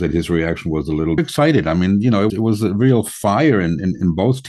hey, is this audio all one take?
no; 2 cuts; at 1.2 s, 2.3 s

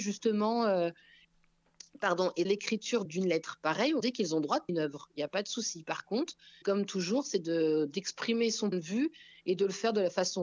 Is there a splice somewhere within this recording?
yes; 7 cuts; at 1.2 s, 2.4 s, 3.0 s, 4.0 s, 4.7 s, 6.6 s, 8.7 s

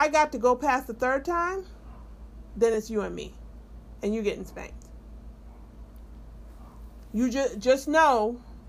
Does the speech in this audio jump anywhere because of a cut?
no; 0 cuts

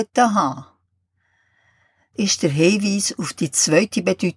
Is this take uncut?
no; 1 cut; at 2.2 s

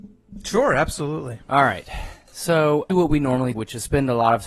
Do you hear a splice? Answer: yes; 2 cuts; at 2.9 s, 3.5 s

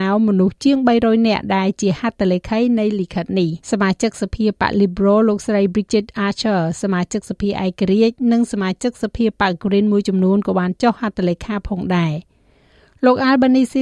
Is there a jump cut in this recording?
yes; 1 cut; at 3.6 s

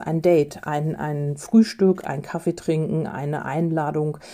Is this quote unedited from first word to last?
yes; 0 cuts

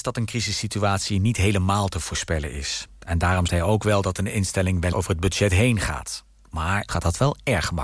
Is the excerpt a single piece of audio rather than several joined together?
no; 3 cuts; at 3.5 s, 4.9 s, 6.9 s

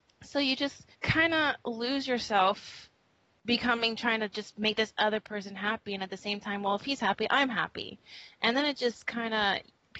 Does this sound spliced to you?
yes; 1 cut; at 0.9 s

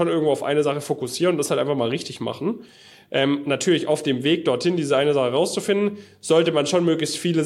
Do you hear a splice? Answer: no; 0 cuts

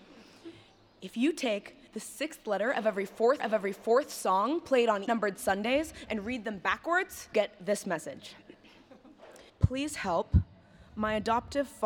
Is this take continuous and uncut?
no; 5 cuts; at 1.9 s, 3.4 s, 5.1 s, 7.3 s, 9.5 s

